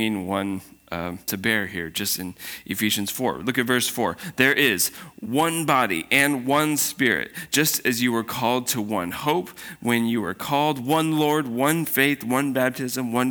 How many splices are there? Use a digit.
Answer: 1